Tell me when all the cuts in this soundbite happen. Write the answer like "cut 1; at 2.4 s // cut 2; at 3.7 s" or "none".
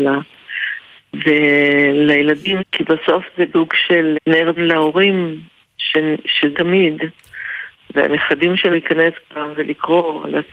cut 1; at 2.6 s // cut 2; at 3.5 s // cut 3; at 4.1 s // cut 4; at 4.6 s // cut 5; at 6.5 s // cut 6; at 8.7 s